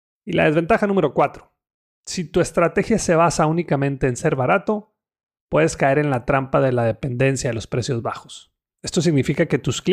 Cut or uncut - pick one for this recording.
uncut